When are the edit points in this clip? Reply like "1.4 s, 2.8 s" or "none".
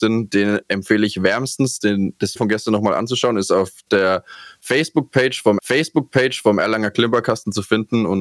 2.4 s, 5.6 s